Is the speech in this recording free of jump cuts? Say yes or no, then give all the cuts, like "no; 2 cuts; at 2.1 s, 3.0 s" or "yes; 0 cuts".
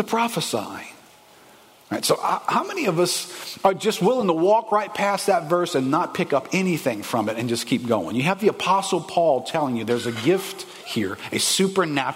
yes; 0 cuts